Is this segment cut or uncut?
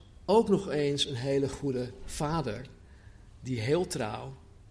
uncut